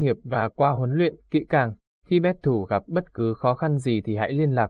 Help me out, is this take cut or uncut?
uncut